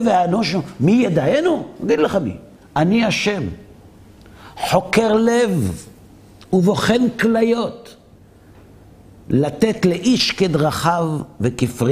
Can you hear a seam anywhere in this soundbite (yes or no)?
no